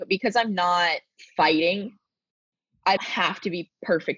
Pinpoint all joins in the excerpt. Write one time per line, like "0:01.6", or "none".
0:01.2
0:03.0